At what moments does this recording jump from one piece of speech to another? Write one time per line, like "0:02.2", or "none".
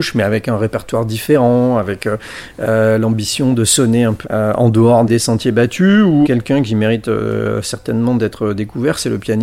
0:04.2
0:05.1
0:06.2